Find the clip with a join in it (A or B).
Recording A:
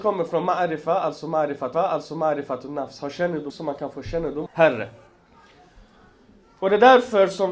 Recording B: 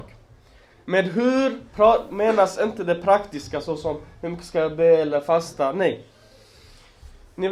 A